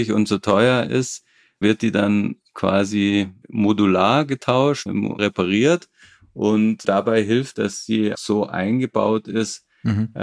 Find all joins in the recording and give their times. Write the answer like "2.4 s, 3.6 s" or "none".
1.6 s, 3.4 s, 4.9 s, 5.2 s, 6.8 s, 7.5 s, 8.1 s